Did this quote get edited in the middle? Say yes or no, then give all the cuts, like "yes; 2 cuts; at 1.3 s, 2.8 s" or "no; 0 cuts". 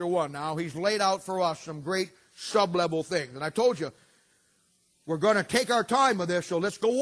no; 0 cuts